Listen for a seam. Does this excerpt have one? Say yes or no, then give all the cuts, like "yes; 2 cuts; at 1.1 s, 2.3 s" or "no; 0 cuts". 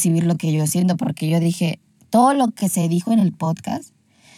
no; 0 cuts